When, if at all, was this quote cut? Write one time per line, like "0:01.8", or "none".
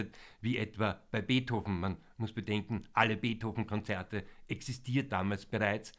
0:05.1

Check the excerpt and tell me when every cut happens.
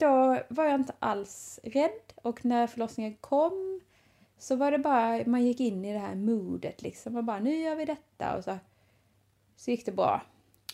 none

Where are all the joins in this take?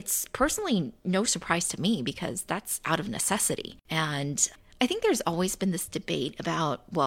none

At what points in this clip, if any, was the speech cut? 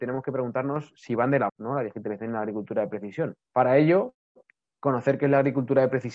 0:01.5
0:03.5
0:04.4

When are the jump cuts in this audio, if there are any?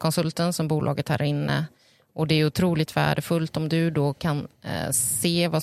none

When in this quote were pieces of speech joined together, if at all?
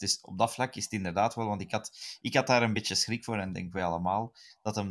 none

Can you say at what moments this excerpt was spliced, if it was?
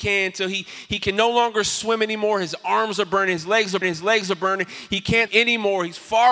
0:03.8
0:05.3

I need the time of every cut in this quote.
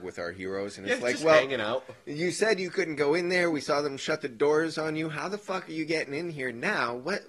none

